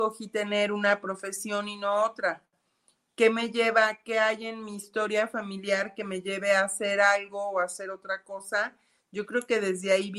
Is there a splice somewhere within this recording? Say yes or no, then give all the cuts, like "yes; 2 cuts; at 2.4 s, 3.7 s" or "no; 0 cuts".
no; 0 cuts